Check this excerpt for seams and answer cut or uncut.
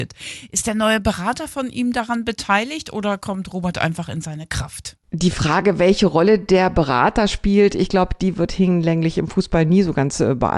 uncut